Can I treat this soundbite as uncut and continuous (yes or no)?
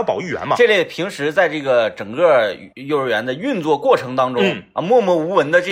no